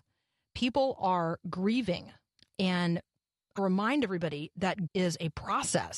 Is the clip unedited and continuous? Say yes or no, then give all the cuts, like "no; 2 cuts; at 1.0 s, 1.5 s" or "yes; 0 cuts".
no; 3 cuts; at 2.3 s, 3.6 s, 4.9 s